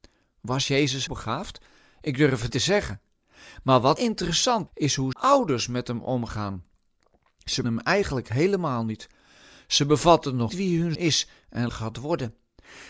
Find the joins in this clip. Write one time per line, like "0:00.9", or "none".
0:01.1
0:02.5
0:04.0
0:04.7
0:05.1
0:07.6
0:10.5
0:10.9
0:11.7